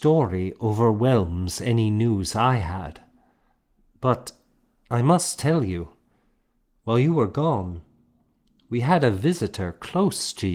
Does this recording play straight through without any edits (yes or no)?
yes